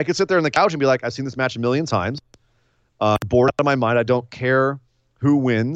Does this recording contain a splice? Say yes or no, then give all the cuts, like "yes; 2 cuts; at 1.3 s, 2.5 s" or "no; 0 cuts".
no; 0 cuts